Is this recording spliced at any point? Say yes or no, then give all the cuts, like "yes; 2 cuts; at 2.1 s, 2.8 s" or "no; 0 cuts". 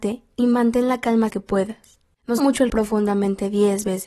yes; 3 cuts; at 1.3 s, 2.4 s, 2.7 s